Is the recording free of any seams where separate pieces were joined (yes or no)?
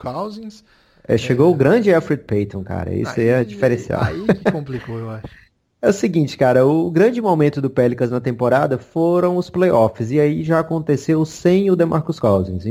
yes